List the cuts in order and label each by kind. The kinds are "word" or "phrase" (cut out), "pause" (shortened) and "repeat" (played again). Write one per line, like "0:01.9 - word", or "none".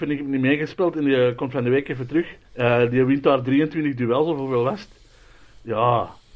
0:02.4 - pause